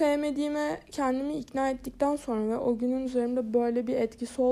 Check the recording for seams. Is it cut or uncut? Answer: cut